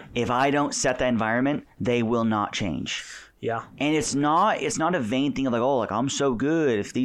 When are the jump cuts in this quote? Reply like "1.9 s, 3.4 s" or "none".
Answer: none

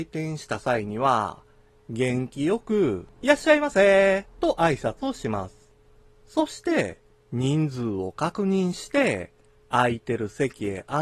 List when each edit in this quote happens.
none

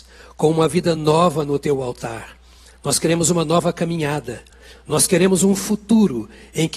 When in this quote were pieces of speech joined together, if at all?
none

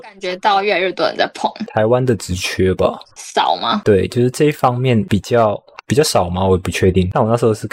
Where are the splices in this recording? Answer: 3.1 s

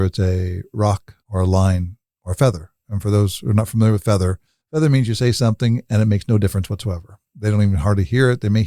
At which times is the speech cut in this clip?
1.2 s, 4.6 s

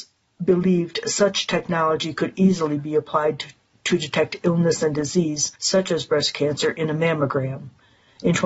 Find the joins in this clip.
5.6 s

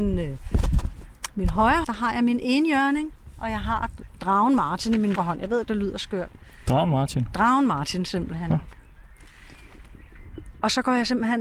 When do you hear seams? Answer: 1.8 s, 5.2 s, 5.7 s

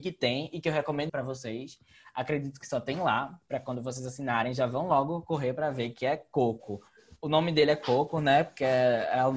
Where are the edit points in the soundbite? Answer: 1.1 s

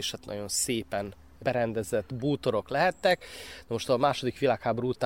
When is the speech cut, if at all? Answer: none

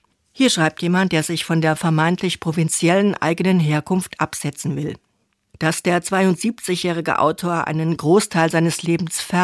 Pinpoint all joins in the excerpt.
none

